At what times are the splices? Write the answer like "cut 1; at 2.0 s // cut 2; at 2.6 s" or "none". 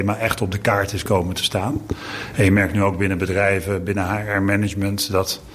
none

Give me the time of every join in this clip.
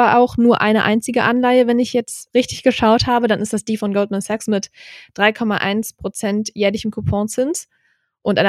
none

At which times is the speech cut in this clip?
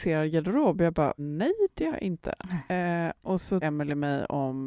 cut 1; at 1.2 s // cut 2; at 1.9 s // cut 3; at 3.6 s

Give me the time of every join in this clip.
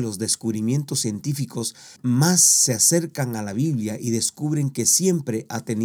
cut 1; at 2.0 s

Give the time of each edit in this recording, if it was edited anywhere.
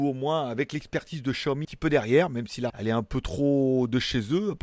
cut 1; at 1.6 s // cut 2; at 2.7 s

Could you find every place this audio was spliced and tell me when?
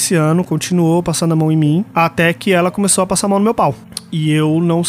cut 1; at 1.9 s

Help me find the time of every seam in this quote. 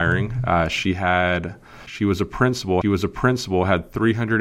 cut 1; at 2.8 s

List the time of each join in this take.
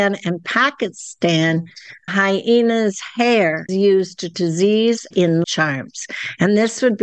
cut 1; at 2.1 s // cut 2; at 3.7 s // cut 3; at 4.3 s // cut 4; at 5.1 s // cut 5; at 5.4 s

